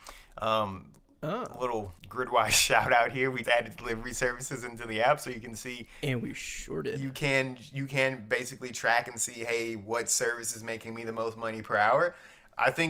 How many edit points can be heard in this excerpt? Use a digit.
2